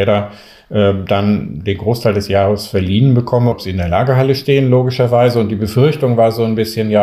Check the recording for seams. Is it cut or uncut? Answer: cut